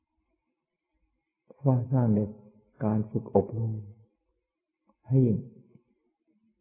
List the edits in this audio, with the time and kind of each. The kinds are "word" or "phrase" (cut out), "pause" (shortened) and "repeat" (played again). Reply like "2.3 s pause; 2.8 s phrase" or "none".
none